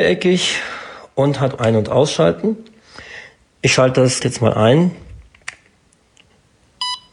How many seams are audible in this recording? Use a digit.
2